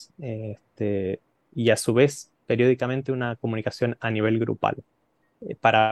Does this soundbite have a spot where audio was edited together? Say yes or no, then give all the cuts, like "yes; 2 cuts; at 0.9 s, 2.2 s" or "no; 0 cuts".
no; 0 cuts